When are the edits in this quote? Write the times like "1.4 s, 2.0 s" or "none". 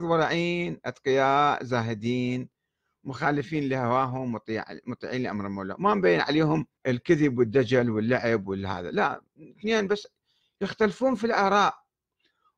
6.8 s